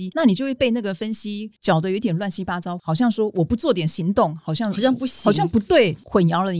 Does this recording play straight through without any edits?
yes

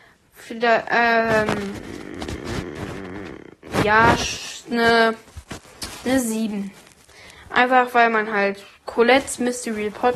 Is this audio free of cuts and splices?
yes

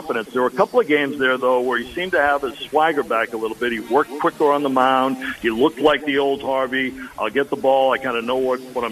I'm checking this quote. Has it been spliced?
no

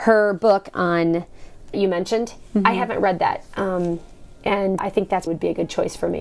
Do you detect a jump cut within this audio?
yes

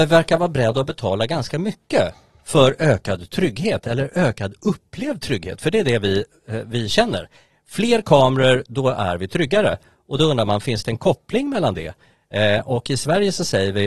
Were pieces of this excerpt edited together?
no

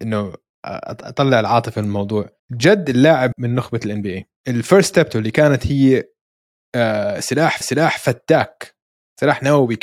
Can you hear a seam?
yes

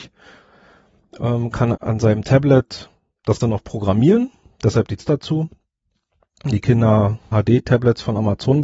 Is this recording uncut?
no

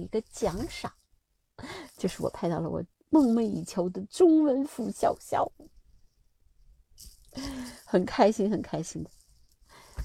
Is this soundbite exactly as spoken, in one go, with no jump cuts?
no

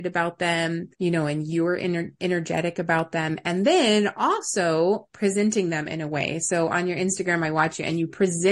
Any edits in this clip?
yes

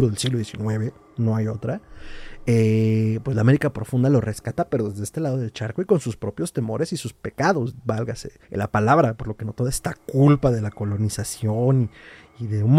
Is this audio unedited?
no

